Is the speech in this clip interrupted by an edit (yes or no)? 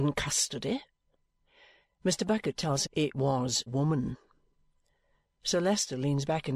yes